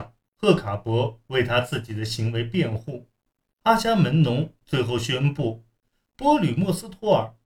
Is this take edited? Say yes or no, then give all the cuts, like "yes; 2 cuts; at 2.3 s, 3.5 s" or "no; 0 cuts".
no; 0 cuts